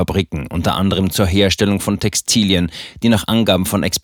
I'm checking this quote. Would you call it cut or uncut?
uncut